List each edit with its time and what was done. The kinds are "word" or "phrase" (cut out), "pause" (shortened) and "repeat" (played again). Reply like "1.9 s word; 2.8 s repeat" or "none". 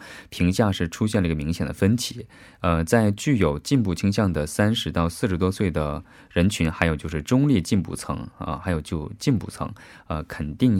none